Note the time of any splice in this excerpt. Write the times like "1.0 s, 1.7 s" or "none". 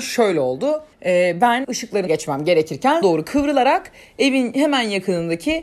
0.9 s, 1.6 s, 2.1 s, 3.0 s